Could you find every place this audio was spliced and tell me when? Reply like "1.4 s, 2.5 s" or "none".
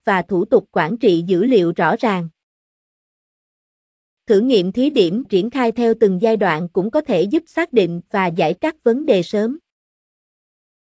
5.2 s, 8.6 s